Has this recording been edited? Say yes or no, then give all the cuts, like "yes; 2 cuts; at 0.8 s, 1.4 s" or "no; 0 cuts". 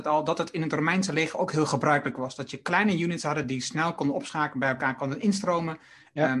no; 0 cuts